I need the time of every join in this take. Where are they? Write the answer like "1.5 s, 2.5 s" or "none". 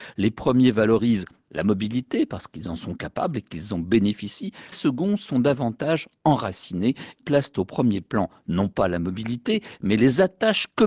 4.7 s, 7.2 s